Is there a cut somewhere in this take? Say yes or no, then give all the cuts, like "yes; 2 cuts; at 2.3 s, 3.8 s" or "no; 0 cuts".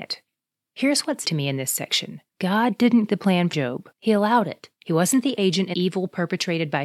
yes; 8 cuts; at 1.2 s, 2.3 s, 3.1 s, 3.5 s, 3.9 s, 4.8 s, 5.4 s, 5.7 s